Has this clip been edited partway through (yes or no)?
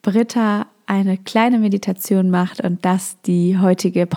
no